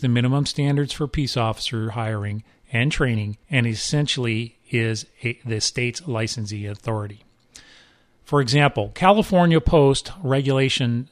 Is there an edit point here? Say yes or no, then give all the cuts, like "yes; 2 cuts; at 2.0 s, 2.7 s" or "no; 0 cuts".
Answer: yes; 1 cut; at 3.4 s